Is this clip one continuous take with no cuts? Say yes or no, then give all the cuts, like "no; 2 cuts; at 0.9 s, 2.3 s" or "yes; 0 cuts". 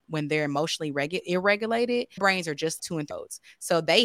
no; 3 cuts; at 2.2 s, 2.8 s, 3.1 s